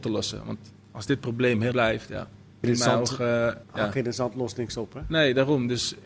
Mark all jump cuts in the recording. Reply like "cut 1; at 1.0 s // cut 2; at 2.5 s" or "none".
cut 1; at 1.7 s // cut 2; at 2.6 s // cut 3; at 3.6 s